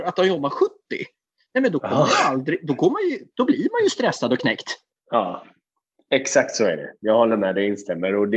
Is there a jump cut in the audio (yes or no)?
no